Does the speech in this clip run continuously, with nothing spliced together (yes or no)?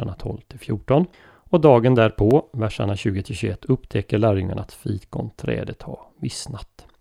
no